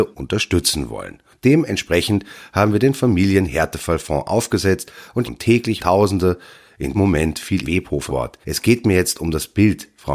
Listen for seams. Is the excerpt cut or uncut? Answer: cut